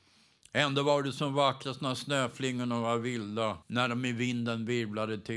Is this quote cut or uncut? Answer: cut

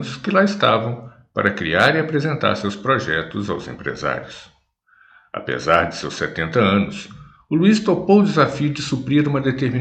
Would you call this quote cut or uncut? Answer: uncut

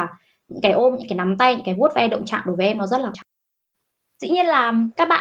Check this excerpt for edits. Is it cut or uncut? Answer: cut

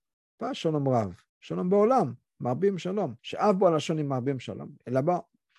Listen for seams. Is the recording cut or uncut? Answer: cut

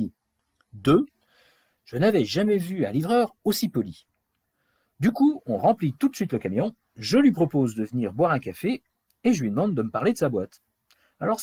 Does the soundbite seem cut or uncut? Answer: uncut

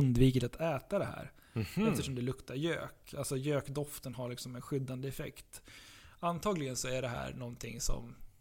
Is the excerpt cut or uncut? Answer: uncut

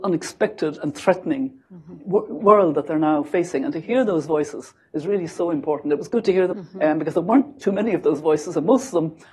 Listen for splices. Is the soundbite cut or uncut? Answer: cut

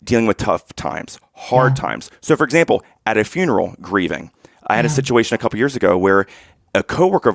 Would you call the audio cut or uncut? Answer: uncut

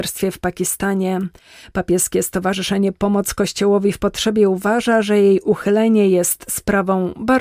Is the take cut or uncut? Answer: uncut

